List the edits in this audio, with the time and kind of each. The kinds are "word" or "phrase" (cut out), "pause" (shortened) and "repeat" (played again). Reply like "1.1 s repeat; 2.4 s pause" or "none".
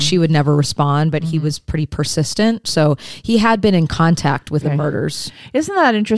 4.6 s phrase

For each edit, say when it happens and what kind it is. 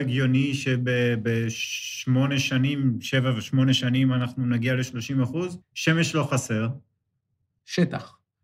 5.6 s pause

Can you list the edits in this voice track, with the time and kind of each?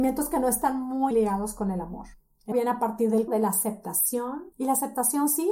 1.1 s word; 2.5 s word; 3.3 s word; 4.5 s pause

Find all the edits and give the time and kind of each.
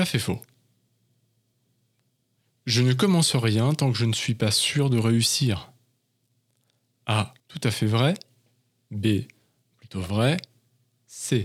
7.4 s pause

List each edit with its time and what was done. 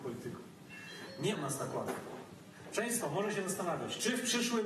1.3 s word; 3.0 s word

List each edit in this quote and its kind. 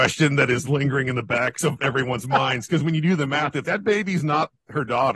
3.6 s word

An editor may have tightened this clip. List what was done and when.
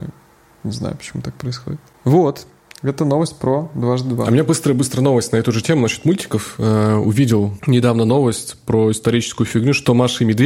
none

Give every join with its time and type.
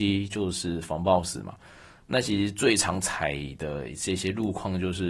none

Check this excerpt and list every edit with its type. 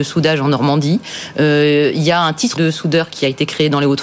2.6 s word

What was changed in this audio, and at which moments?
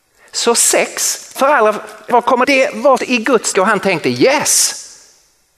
1.4 s word; 2.1 s word; 2.4 s word; 3.0 s word; 3.5 s word

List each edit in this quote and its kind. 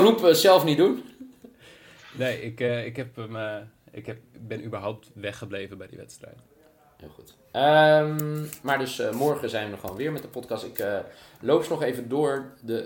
none

